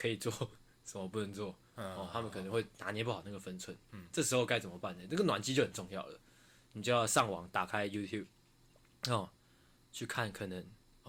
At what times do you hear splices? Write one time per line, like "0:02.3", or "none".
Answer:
none

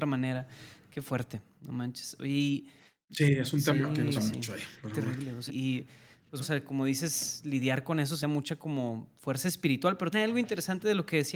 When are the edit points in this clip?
0:04.2
0:05.5
0:06.4
0:08.2
0:10.1

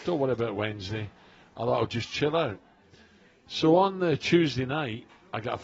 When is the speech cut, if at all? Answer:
none

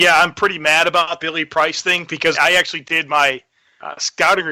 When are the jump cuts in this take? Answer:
0:01.2
0:02.3

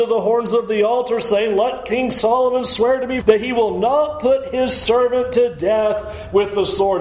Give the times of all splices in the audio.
0:03.2

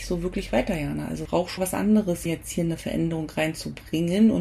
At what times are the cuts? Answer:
0:01.3
0:01.6
0:02.3

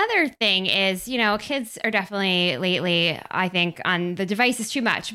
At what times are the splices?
none

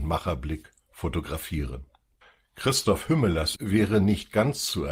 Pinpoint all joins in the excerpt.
0:02.2
0:03.6

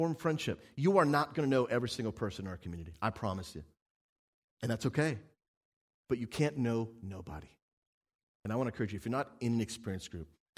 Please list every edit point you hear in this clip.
none

